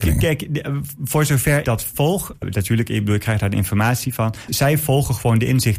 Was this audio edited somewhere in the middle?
yes; 3 cuts; at 1.6 s, 2.4 s, 4.5 s

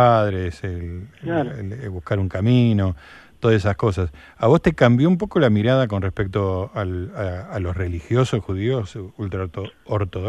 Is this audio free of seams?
yes; 0 cuts

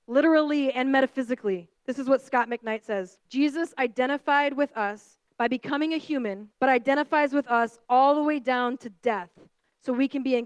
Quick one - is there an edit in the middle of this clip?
yes; 4 cuts; at 1.8 s, 3.2 s, 5.3 s, 6.6 s

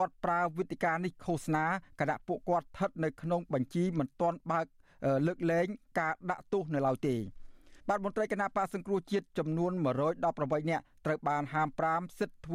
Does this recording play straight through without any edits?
no; 1 cut; at 7.8 s

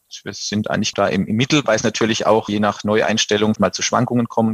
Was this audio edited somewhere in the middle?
yes; 3 cuts; at 0.9 s, 2.5 s, 3.6 s

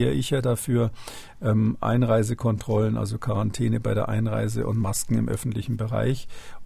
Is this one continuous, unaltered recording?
yes; 0 cuts

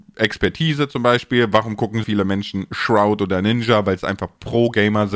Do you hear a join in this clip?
yes; 1 cut; at 2.0 s

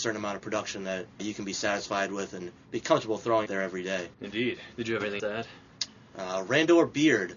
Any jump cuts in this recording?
yes; 4 cuts; at 1.2 s, 3.5 s, 4.1 s, 5.2 s

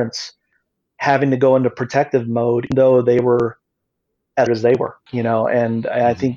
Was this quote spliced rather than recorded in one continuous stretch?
yes; 3 cuts; at 2.7 s, 4.5 s, 5.1 s

